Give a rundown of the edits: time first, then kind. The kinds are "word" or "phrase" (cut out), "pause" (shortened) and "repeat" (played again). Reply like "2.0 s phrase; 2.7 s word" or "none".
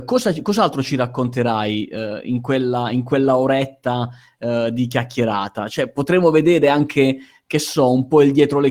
none